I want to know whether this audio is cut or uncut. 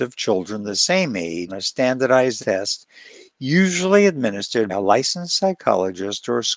cut